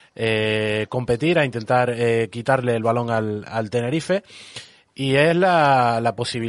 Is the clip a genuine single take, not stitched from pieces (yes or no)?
yes